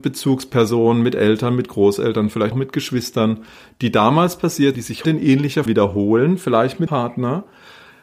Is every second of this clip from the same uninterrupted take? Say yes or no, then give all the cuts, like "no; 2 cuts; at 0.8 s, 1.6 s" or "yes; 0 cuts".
no; 5 cuts; at 2.5 s, 4.7 s, 5.0 s, 5.7 s, 6.9 s